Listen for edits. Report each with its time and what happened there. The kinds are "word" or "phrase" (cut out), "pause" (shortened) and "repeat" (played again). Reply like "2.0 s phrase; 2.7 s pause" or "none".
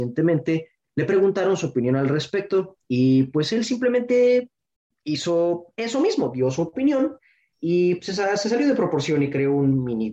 none